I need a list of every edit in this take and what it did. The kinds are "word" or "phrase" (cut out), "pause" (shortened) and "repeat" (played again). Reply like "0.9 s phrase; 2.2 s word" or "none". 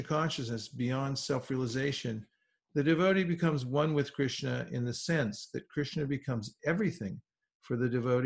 none